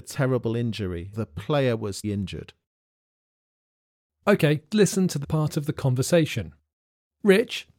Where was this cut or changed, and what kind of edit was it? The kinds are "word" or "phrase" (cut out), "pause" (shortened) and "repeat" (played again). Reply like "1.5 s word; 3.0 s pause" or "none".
1.1 s word; 2.0 s word; 4.7 s word; 5.2 s word